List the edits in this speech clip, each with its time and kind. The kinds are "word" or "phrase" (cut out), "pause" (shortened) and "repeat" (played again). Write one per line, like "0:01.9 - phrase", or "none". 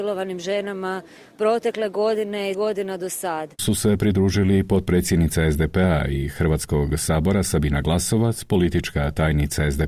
0:02.5 - word
0:03.6 - phrase